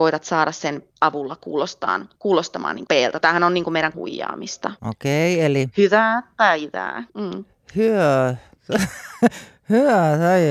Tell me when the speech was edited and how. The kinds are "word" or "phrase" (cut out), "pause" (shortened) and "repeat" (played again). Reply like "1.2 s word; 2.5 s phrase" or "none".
0.9 s phrase; 2.2 s pause; 2.9 s word; 3.2 s word; 3.9 s word; 4.8 s pause; 7.1 s pause